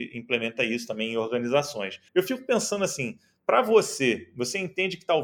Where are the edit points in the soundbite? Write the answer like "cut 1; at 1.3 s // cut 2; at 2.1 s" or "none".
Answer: cut 1; at 2.1 s